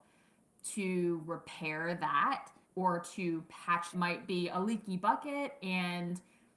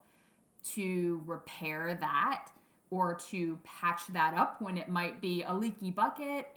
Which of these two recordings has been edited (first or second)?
first